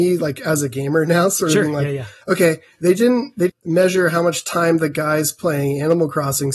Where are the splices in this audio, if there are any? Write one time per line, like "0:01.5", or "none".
0:03.5

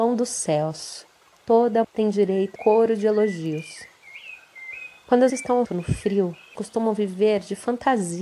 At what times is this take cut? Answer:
0:01.8
0:02.6
0:05.3
0:05.6
0:06.5

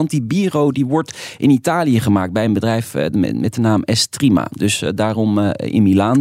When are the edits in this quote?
none

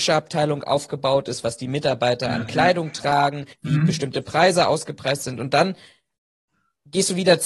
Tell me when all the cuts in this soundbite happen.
0:03.5

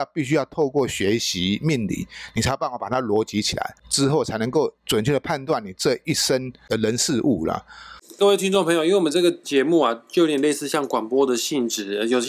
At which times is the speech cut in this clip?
0:09.4

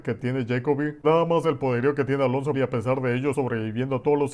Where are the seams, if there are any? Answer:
0:01.0
0:01.4
0:02.5
0:03.3

